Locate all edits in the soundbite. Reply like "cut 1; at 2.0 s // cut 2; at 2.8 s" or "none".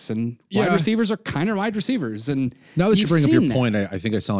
none